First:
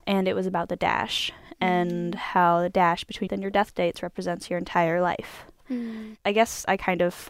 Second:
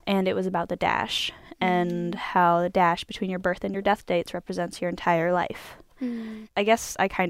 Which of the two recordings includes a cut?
first; 1 cut; at 3.3 s

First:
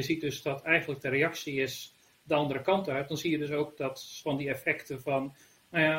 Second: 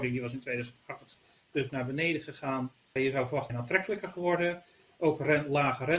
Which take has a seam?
second; 3 cuts; at 1.7 s, 3.0 s, 3.5 s

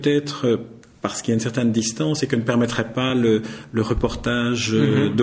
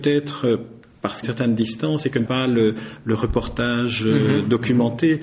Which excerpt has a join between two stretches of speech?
second; 2 cuts; at 1.2 s, 2.3 s

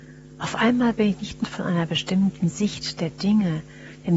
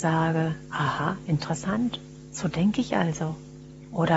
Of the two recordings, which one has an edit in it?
first; 1 cut; at 1.4 s

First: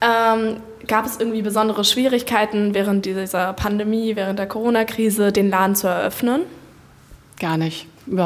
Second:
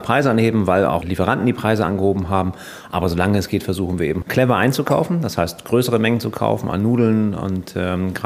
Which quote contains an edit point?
second; 2 cuts; at 1.0 s, 4.2 s

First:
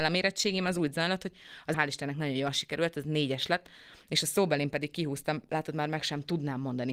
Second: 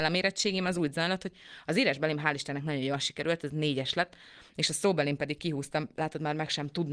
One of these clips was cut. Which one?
first; 1 cut; at 1.7 s

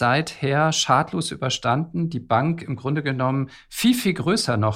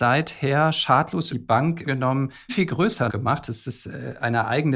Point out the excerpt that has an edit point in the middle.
second; 4 cuts; at 1.3 s, 1.8 s, 2.5 s, 3.1 s

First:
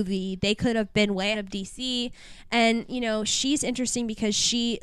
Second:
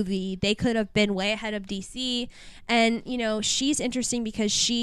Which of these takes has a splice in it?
first; 1 cut; at 1.3 s

